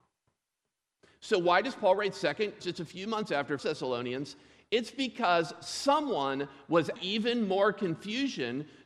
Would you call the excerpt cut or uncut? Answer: cut